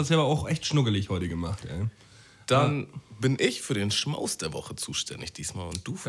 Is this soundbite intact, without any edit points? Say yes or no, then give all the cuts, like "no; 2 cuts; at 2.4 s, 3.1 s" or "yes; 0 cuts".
yes; 0 cuts